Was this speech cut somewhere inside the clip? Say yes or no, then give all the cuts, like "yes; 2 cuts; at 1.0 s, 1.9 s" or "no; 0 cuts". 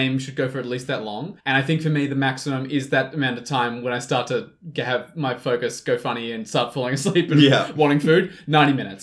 yes; 1 cut; at 1.4 s